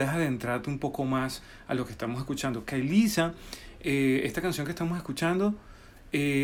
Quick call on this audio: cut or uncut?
uncut